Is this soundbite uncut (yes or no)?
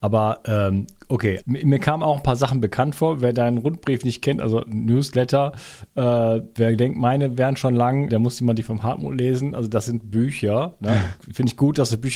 no